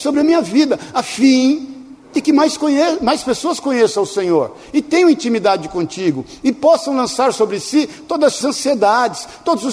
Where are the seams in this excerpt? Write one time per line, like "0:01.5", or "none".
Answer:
0:08.4